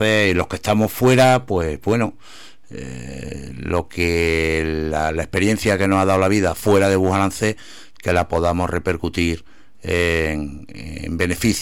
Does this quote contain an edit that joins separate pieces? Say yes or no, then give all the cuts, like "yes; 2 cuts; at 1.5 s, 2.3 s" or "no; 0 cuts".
no; 0 cuts